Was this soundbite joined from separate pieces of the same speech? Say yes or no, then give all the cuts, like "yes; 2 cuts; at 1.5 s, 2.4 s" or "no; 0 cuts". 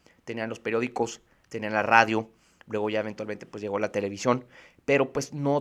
no; 0 cuts